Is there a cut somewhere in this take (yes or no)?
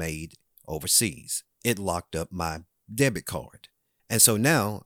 yes